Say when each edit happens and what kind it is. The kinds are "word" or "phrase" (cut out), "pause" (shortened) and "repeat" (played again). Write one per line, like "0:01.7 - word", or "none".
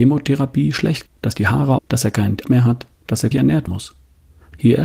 0:01.1 - word
0:01.8 - word
0:02.4 - word
0:02.9 - pause
0:03.3 - word
0:03.7 - word